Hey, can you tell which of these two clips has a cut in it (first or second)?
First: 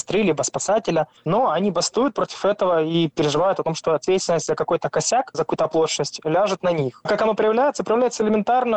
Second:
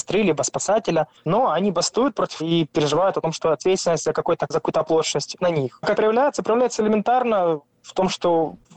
second